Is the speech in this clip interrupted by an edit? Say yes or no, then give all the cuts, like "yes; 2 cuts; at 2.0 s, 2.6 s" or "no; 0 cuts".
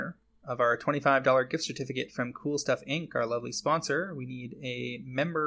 no; 0 cuts